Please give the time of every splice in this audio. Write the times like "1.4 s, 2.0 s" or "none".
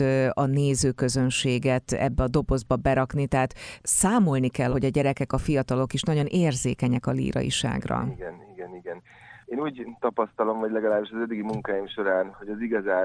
4.7 s